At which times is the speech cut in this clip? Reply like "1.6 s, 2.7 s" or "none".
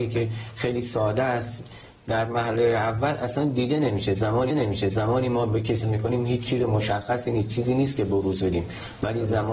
1.9 s, 4.5 s, 5.8 s